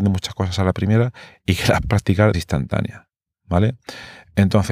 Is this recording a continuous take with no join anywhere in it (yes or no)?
no